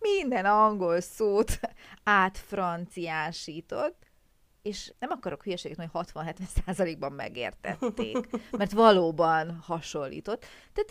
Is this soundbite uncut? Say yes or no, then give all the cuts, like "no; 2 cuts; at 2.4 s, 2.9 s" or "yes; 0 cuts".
no; 1 cut; at 4.9 s